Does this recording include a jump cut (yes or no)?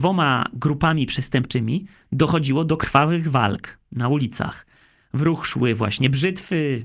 no